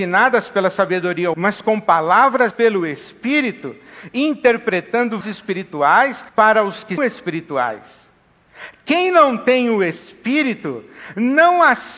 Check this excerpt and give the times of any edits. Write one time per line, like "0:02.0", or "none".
0:01.3
0:02.5
0:05.2
0:06.3
0:07.0